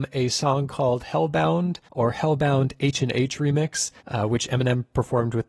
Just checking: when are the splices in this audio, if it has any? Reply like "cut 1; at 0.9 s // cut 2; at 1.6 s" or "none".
cut 1; at 1.9 s // cut 2; at 4.0 s